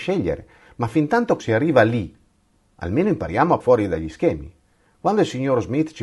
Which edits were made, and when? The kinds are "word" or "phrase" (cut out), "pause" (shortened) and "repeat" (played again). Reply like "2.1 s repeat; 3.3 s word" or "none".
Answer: 1.4 s word; 3.6 s word